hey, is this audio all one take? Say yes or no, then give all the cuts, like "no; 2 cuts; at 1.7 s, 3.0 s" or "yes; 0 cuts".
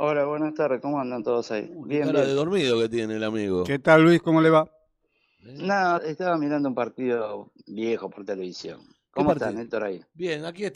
no; 2 cuts; at 6.0 s, 7.6 s